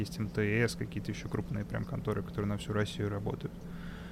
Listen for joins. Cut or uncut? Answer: uncut